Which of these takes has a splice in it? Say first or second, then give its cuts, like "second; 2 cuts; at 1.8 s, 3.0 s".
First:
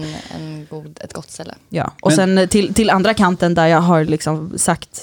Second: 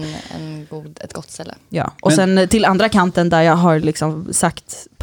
second; 1 cut; at 2.5 s